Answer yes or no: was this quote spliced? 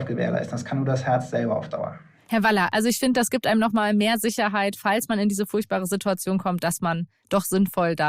no